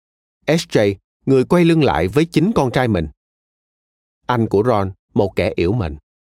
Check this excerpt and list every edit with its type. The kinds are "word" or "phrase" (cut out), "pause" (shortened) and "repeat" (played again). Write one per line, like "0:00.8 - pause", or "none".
none